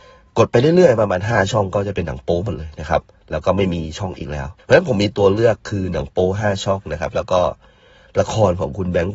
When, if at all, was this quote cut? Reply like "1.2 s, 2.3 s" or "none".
4.6 s